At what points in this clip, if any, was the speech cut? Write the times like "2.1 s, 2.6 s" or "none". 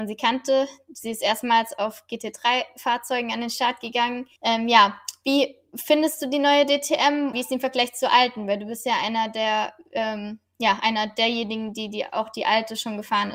4.4 s, 7.3 s

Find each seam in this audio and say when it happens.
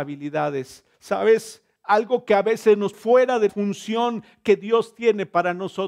0.9 s, 2.9 s, 3.5 s

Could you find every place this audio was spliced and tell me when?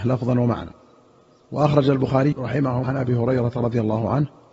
2.3 s, 2.8 s

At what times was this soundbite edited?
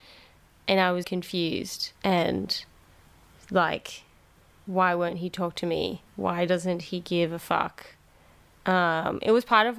1.0 s, 2.0 s, 6.1 s

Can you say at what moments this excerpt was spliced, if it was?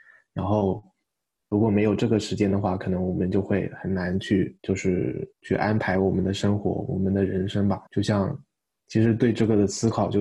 4.6 s, 5.3 s, 7.9 s

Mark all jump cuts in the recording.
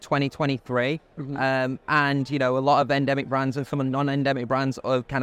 none

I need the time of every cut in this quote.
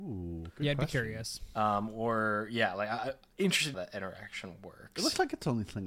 3.7 s

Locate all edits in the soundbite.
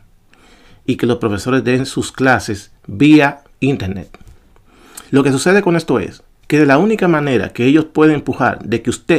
5.1 s

